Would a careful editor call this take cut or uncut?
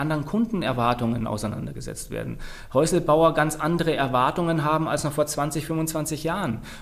uncut